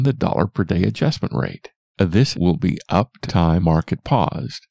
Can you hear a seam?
yes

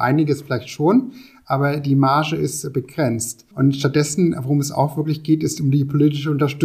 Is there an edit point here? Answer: yes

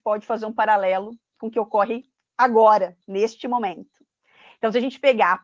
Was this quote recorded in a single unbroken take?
yes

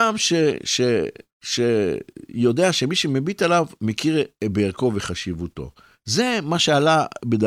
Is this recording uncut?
yes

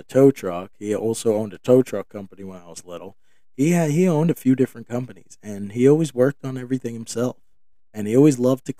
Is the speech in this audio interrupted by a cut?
no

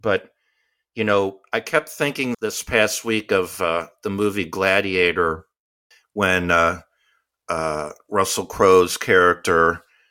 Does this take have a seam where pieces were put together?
yes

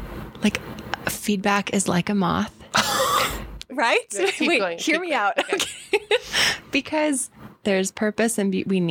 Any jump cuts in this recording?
no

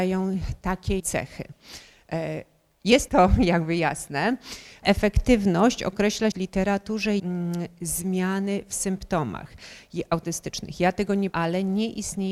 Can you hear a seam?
yes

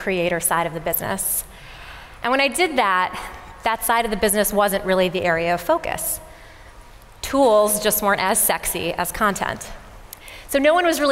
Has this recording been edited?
no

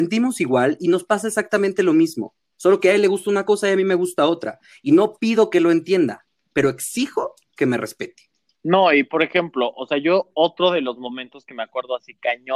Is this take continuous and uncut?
yes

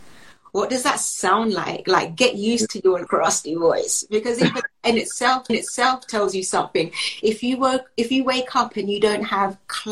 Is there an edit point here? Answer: yes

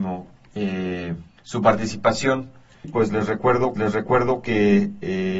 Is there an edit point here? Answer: yes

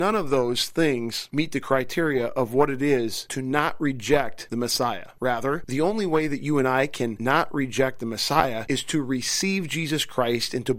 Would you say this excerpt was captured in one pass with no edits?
yes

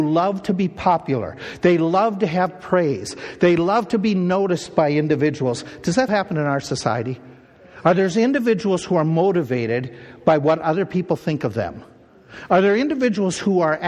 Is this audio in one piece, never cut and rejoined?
no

